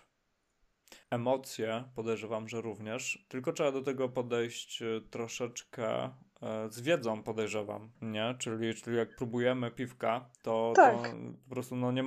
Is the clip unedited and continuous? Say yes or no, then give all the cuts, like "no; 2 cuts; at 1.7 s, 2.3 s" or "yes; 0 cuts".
no; 3 cuts; at 1.0 s, 7.9 s, 10.3 s